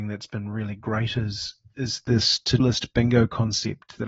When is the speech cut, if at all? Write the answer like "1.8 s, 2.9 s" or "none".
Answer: 2.6 s